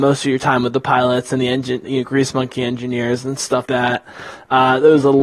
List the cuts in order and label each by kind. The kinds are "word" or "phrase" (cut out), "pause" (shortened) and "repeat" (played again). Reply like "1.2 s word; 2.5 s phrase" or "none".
1.8 s word; 3.7 s word